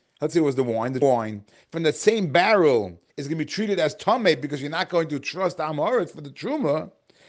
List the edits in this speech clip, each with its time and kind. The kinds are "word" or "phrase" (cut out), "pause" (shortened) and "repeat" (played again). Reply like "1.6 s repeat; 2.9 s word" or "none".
1.0 s word; 3.1 s pause